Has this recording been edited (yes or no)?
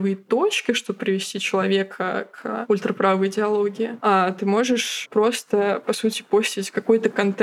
no